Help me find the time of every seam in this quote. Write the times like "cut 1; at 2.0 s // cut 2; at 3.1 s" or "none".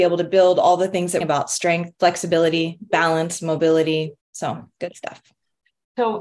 cut 1; at 1.2 s // cut 2; at 1.9 s // cut 3; at 4.2 s